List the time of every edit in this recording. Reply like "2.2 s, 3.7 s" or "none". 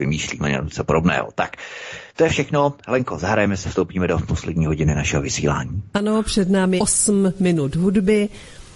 3.6 s, 6.8 s